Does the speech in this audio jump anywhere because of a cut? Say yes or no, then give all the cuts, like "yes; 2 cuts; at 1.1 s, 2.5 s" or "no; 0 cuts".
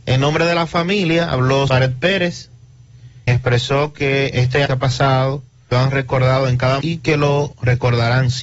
yes; 6 cuts; at 1.7 s, 3.3 s, 4.3 s, 4.7 s, 5.7 s, 6.8 s